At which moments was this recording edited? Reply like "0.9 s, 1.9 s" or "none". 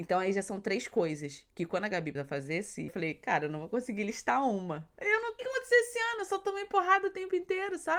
2.2 s, 2.9 s, 5.4 s